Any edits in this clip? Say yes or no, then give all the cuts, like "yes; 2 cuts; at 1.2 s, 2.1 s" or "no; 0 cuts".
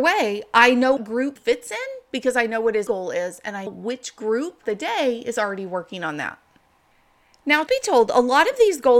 yes; 6 cuts; at 1.0 s, 1.4 s, 2.9 s, 3.7 s, 4.6 s, 7.7 s